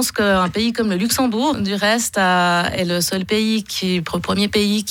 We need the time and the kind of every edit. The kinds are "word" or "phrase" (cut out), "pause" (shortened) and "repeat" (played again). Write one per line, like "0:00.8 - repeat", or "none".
0:01.5 - word